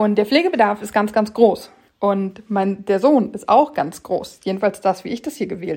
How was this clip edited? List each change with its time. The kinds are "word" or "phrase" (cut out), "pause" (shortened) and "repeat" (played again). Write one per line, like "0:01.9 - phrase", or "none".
0:01.9 - pause